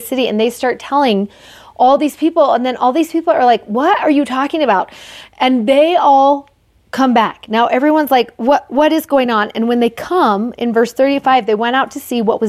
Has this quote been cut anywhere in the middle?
no; 0 cuts

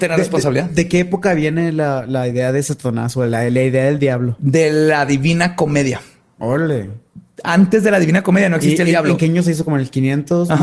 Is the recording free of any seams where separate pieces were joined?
yes; 0 cuts

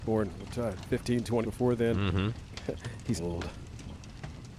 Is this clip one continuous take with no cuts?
no; 2 cuts; at 1.4 s, 3.2 s

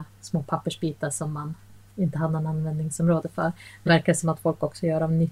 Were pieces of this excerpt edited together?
yes; 1 cut; at 3.9 s

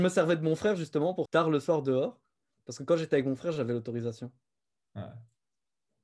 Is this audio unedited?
no; 1 cut; at 1.3 s

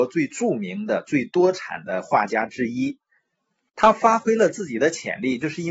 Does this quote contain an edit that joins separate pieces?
no; 0 cuts

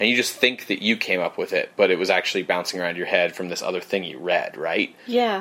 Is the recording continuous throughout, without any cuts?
yes; 0 cuts

